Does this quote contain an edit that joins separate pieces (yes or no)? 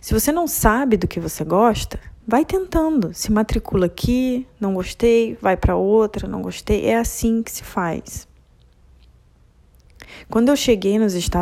yes